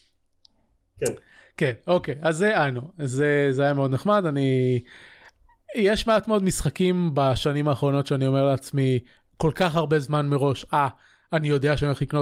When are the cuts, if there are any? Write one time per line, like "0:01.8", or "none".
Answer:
none